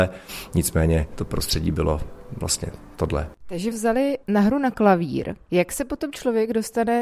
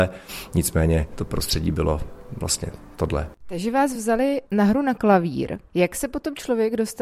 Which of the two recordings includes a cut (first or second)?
first